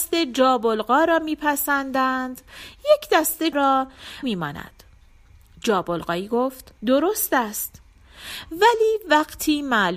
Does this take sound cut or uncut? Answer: cut